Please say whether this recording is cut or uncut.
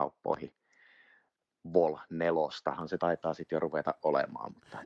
uncut